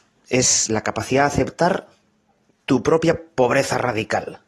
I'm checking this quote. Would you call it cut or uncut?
uncut